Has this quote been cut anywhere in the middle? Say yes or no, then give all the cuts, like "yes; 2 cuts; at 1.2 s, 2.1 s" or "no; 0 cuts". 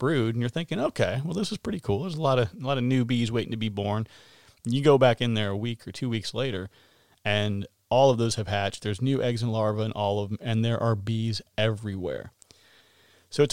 no; 0 cuts